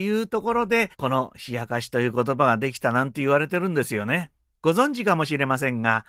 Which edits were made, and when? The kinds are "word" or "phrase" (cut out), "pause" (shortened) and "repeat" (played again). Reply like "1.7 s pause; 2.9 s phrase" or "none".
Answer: 0.9 s pause; 4.4 s pause